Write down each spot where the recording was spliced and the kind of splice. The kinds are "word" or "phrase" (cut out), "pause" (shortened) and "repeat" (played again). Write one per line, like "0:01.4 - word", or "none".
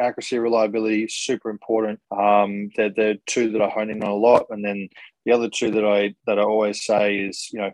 0:02.1 - pause